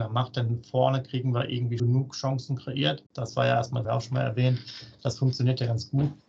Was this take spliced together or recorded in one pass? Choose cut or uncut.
cut